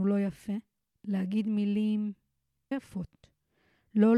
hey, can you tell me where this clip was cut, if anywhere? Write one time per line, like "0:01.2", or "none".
0:02.7